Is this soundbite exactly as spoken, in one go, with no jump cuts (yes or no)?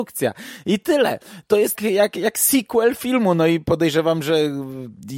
no